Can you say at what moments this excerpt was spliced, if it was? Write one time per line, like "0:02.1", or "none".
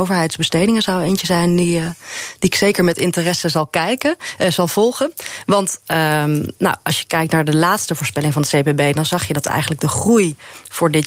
none